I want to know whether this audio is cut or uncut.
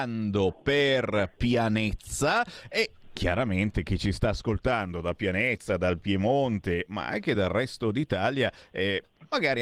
uncut